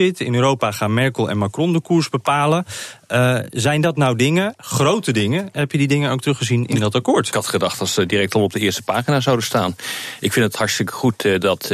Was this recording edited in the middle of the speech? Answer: no; 0 cuts

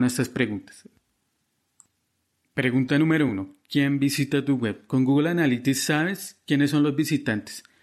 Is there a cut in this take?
no; 0 cuts

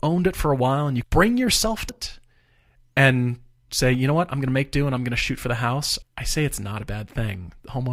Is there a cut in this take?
yes; 3 cuts; at 1.0 s, 1.9 s, 6.0 s

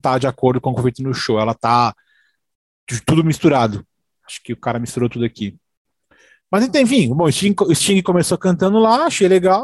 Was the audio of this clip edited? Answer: no; 0 cuts

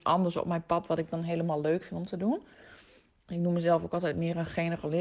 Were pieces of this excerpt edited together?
no; 0 cuts

